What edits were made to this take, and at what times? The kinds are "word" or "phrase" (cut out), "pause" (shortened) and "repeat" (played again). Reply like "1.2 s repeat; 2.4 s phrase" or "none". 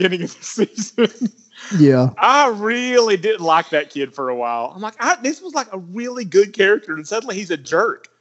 none